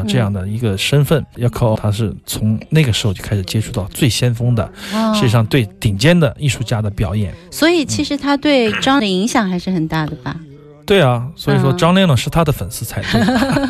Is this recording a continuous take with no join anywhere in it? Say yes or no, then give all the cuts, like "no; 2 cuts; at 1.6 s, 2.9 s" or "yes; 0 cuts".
no; 2 cuts; at 1.8 s, 9.0 s